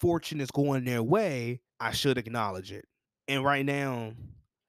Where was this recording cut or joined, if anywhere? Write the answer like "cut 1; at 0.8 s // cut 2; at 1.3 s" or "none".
cut 1; at 1.7 s // cut 2; at 3.1 s